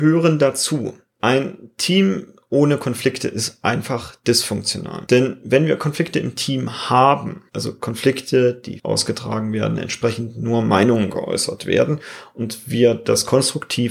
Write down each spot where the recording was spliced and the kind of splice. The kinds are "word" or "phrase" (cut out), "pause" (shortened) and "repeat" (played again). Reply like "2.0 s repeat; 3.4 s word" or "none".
7.5 s pause; 8.8 s phrase

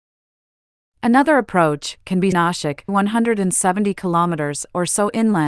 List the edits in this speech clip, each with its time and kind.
2.3 s phrase; 2.9 s phrase

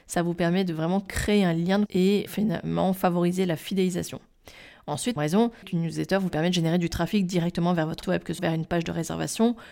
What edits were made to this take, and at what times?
1.9 s word; 2.3 s word; 5.2 s word; 5.6 s word; 8.0 s word; 8.4 s word

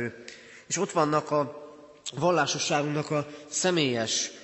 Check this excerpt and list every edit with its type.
none

